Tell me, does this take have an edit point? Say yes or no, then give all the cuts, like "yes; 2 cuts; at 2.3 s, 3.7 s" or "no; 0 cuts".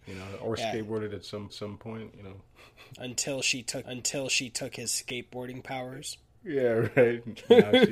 yes; 3 cuts; at 1.5 s, 2.5 s, 3.8 s